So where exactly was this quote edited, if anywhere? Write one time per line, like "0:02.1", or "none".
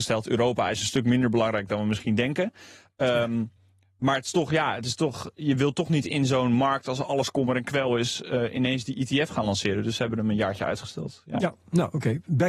none